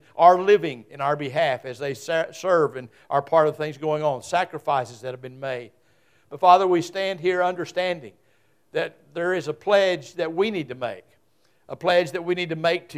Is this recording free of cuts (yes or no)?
yes